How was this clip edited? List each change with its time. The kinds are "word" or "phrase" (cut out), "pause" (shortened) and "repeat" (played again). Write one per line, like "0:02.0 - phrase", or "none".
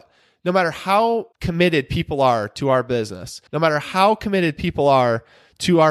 0:01.3 - pause
0:03.5 - pause

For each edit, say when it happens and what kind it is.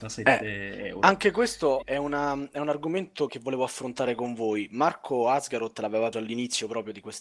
0:01.8 - word
0:03.3 - word
0:06.1 - word

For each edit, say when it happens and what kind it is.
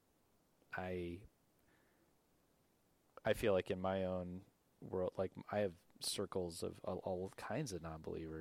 none

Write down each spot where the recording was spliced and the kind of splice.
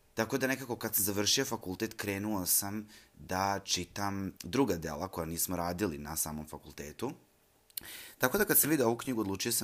0:04.4 - pause

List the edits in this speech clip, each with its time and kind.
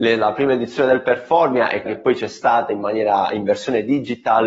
0:01.9 - word

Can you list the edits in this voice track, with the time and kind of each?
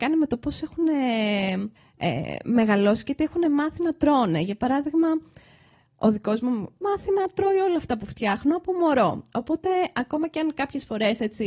0:01.8 - pause
0:06.8 - phrase

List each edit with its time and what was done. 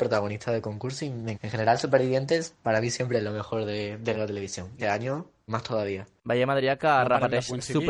0:01.3 - word
0:04.1 - word
0:04.8 - word
0:05.5 - word

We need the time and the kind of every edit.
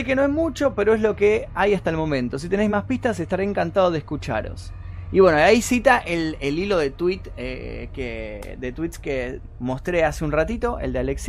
none

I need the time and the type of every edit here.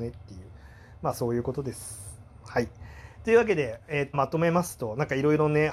0:04.1 - phrase

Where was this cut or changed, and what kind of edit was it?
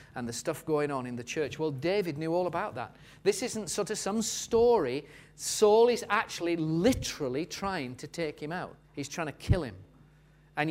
0:08.8 - pause

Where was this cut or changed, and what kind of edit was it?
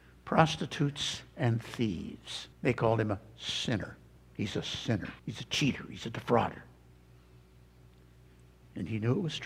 0:02.5 - pause
0:04.2 - pause
0:05.2 - pause

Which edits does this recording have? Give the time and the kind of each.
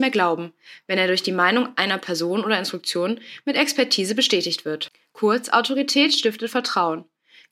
none

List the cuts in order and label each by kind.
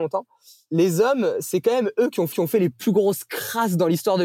0:02.3 - repeat

